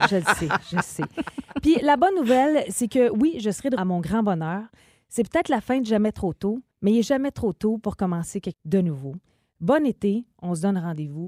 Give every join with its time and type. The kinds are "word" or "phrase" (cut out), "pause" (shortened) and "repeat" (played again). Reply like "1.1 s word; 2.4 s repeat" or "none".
3.8 s phrase; 6.7 s pause; 8.5 s word

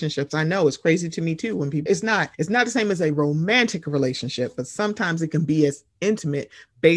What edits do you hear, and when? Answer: 1.9 s word; 2.3 s pause

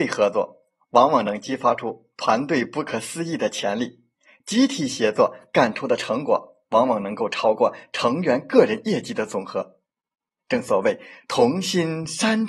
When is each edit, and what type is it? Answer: none

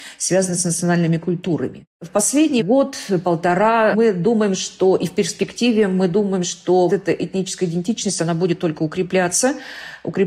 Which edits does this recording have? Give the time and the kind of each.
6.9 s word

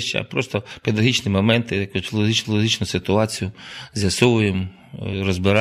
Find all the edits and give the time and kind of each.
2.4 s repeat

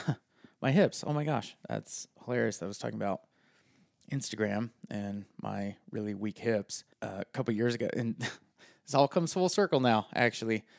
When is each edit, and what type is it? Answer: 6.9 s pause

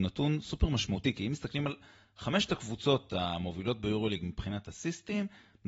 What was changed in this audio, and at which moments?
none

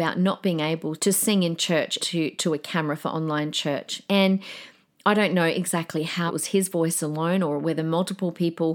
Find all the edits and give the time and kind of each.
1.0 s word; 2.0 s word; 6.3 s word

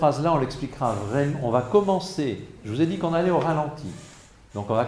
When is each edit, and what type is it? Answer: none

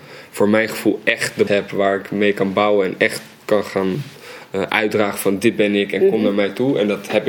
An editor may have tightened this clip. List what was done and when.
1.5 s word

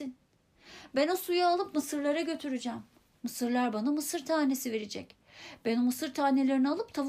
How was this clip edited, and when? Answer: none

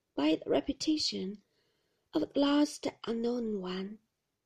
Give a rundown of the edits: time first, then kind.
none

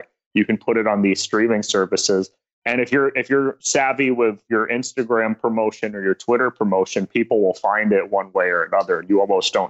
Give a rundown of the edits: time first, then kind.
none

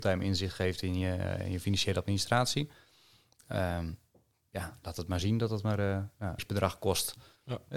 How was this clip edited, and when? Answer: 6.4 s word

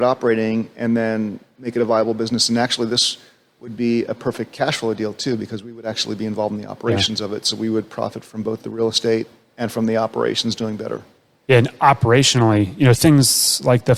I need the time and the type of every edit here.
none

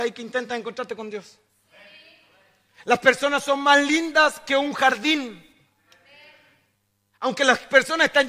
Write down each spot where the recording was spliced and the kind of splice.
none

